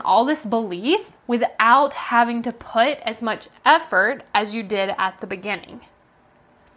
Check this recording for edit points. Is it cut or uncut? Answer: cut